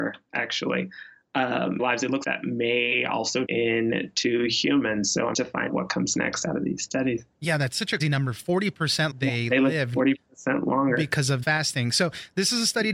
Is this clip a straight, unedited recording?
no; 8 cuts; at 1.8 s, 2.2 s, 3.5 s, 5.3 s, 5.7 s, 8.0 s, 9.1 s, 11.4 s

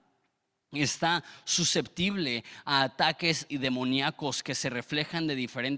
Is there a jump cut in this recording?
yes; 1 cut; at 3.5 s

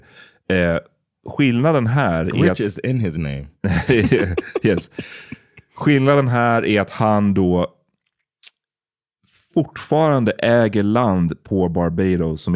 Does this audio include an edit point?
no; 0 cuts

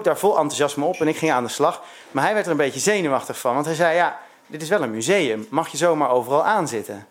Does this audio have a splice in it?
no; 0 cuts

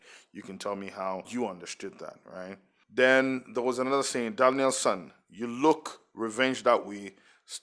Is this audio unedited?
yes; 0 cuts

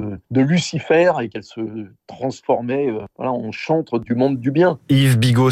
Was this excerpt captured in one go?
yes; 0 cuts

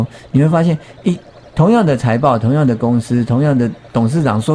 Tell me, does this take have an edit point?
no; 0 cuts

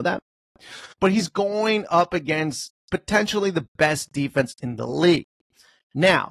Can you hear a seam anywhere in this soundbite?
yes; 2 cuts; at 0.9 s, 2.8 s

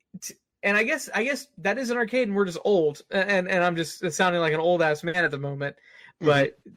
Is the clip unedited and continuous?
yes; 0 cuts

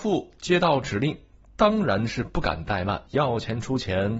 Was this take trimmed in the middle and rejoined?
yes; 1 cut; at 3.1 s

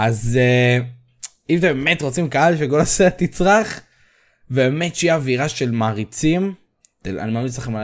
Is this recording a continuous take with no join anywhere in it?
yes; 0 cuts

